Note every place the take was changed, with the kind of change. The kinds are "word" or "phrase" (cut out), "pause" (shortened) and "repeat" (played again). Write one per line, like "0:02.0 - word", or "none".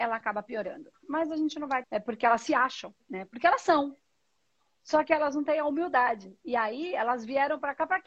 0:01.8 - word